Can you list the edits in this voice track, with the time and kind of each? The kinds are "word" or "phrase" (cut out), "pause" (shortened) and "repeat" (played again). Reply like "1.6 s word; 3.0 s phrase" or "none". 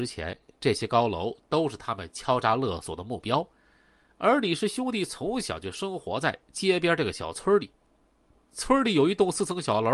none